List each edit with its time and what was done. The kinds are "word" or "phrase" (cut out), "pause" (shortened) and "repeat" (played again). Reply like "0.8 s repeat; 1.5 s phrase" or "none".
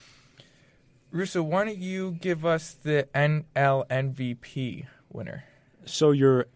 none